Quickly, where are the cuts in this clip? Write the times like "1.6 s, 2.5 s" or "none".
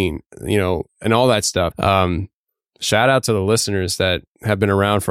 1.7 s